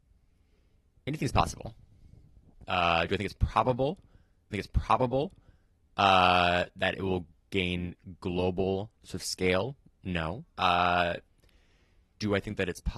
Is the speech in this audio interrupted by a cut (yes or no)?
yes